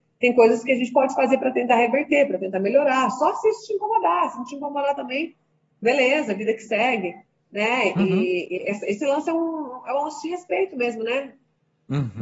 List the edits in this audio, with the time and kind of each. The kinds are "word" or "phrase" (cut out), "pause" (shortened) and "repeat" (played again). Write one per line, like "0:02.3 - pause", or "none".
none